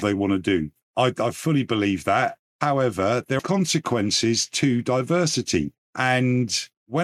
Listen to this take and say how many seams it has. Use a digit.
1